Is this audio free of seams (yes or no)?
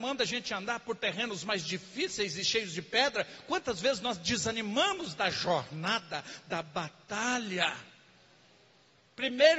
yes